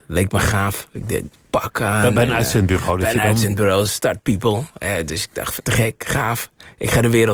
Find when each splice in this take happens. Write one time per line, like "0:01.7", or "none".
0:05.6

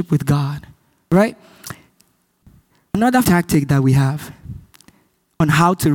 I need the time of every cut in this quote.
0:03.2

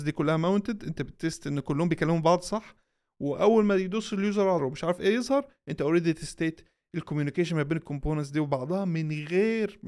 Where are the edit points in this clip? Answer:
0:04.6

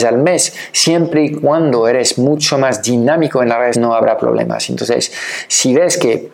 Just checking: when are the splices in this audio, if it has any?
0:03.7

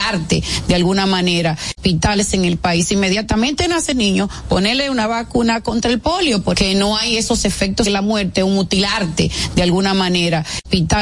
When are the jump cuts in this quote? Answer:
0:03.9
0:06.5
0:07.9

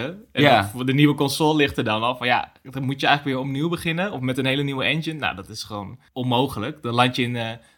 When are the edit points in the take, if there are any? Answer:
0:06.1

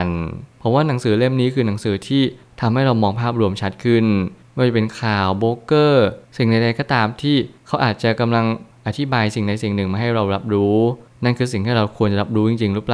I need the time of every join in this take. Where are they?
none

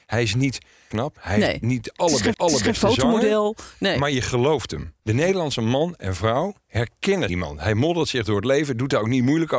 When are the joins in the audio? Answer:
0:00.9
0:02.3
0:05.0
0:07.3

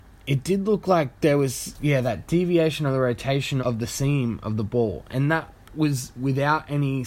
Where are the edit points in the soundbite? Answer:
0:03.6

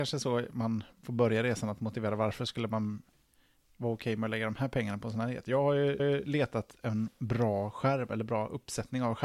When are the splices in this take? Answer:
0:06.0

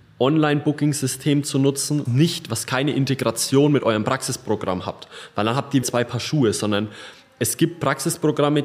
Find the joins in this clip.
0:02.1
0:05.8

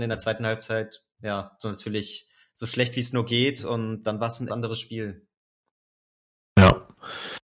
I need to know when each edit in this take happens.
0:01.6
0:04.5

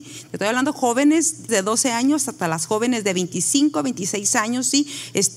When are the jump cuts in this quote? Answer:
0:01.5

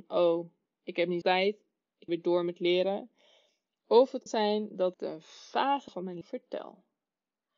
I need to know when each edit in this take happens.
0:01.2
0:02.1
0:04.3
0:04.9
0:05.9
0:06.2

